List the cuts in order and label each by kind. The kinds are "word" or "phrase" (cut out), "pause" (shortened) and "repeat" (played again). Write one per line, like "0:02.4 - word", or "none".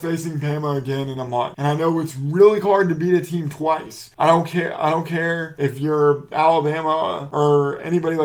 none